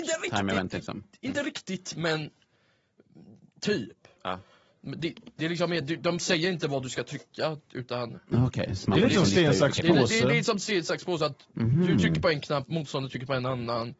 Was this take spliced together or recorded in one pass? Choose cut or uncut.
uncut